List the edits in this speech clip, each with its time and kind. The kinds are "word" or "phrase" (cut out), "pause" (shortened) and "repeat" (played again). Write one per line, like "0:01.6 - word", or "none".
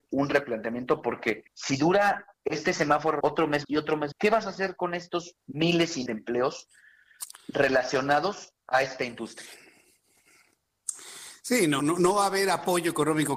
0:01.5 - pause
0:02.3 - pause
0:03.2 - word
0:03.6 - word
0:04.1 - word
0:05.4 - pause
0:06.1 - word
0:08.6 - pause
0:11.8 - word